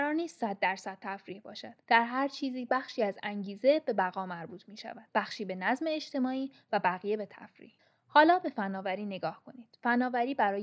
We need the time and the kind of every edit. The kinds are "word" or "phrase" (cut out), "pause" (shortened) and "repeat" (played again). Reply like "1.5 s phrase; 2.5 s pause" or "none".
1.8 s pause; 5.1 s pause; 7.8 s pause